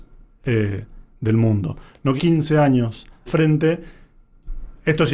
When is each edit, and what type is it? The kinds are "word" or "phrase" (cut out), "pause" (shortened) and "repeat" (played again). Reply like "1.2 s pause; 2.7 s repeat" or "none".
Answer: 2.2 s word; 3.3 s word